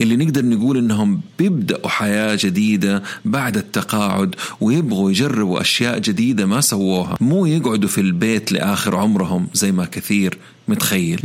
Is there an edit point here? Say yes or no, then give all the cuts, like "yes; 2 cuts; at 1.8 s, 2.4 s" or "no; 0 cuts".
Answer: no; 0 cuts